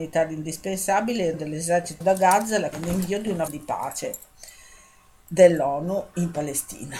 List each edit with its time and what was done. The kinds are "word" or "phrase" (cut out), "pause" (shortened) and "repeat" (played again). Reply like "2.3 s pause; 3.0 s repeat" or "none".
1.3 s word; 2.0 s word; 2.7 s word; 3.5 s word